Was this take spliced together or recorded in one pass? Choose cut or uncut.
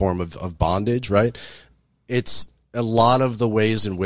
uncut